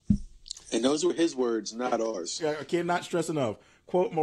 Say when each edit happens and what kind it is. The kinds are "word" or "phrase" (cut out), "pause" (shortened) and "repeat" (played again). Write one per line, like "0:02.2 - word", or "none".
none